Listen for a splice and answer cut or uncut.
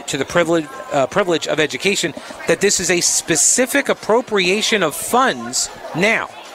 uncut